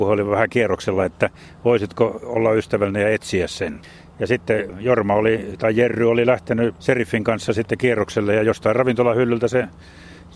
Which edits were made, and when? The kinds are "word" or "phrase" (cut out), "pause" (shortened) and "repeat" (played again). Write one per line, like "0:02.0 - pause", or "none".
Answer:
0:06.8 - phrase